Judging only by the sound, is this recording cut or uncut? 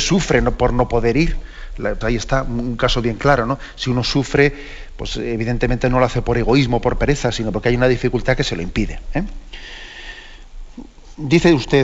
cut